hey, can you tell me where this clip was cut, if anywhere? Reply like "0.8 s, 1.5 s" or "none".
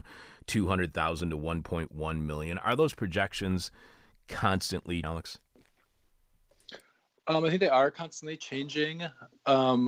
5.0 s